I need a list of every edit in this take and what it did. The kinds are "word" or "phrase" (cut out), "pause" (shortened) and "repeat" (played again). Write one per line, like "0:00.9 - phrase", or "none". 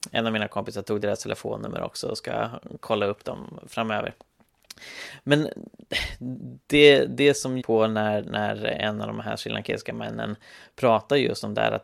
0:06.6 - pause
0:07.6 - phrase